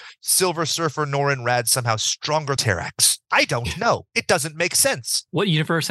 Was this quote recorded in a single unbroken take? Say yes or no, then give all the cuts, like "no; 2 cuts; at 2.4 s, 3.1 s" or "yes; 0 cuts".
no; 1 cut; at 2.6 s